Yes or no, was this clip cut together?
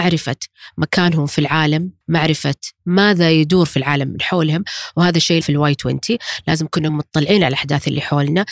yes